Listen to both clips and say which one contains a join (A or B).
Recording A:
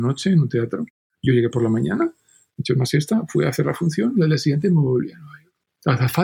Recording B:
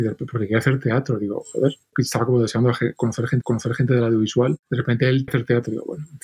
B